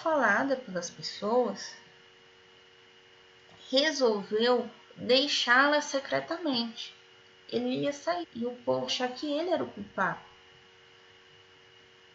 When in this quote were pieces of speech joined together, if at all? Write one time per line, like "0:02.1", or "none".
0:07.1
0:08.2
0:08.9